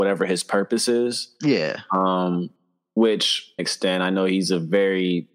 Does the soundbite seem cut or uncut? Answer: cut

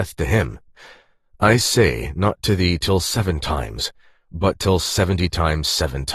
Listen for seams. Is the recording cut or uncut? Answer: uncut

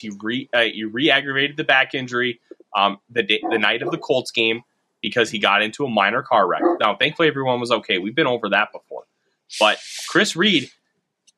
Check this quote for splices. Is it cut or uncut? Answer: uncut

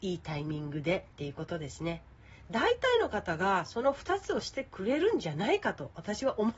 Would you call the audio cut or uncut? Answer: uncut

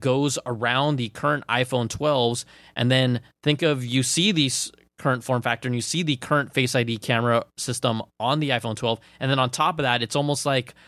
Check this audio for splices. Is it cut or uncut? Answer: uncut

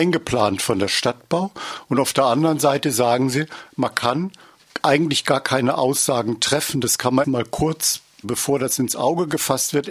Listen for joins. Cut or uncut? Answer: cut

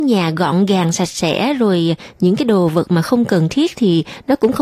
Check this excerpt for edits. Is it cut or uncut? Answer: uncut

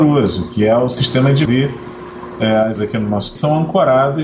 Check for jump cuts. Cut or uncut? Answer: cut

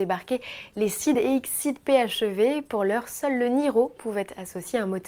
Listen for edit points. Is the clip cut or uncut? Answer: uncut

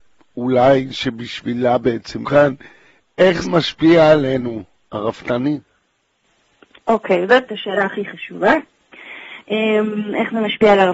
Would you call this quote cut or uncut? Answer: cut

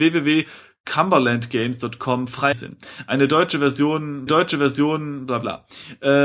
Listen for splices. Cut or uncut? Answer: cut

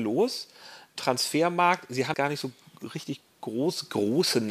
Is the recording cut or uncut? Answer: cut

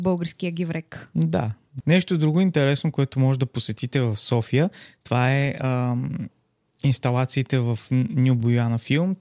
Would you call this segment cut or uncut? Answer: uncut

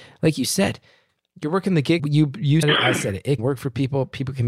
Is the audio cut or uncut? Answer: cut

